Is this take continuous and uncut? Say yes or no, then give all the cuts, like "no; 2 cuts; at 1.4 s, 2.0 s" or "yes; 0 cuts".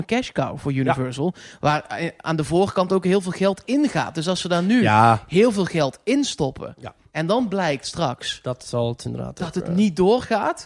yes; 0 cuts